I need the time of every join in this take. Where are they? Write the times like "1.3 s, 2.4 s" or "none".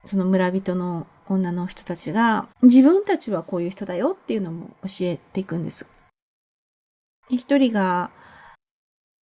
2.5 s